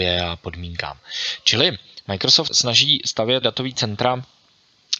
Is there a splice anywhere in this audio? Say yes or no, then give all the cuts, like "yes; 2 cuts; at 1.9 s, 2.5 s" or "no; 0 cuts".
yes; 2 cuts; at 2.5 s, 3.4 s